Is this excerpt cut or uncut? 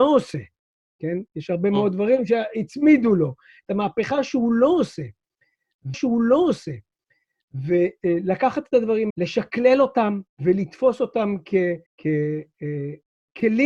cut